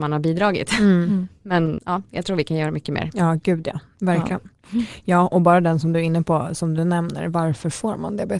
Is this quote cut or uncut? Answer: cut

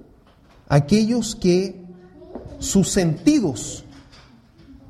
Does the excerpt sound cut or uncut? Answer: uncut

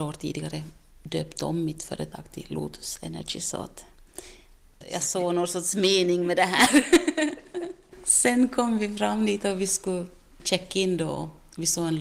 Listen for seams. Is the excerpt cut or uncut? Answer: uncut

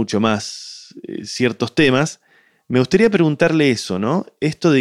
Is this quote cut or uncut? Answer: uncut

